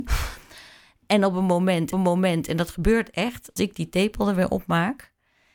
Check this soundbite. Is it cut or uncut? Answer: cut